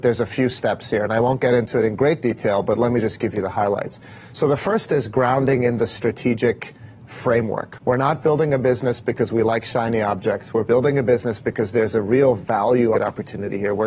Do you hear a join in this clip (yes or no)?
yes